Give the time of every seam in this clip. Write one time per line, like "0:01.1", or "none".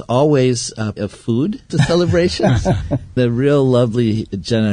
0:01.0
0:01.7
0:03.2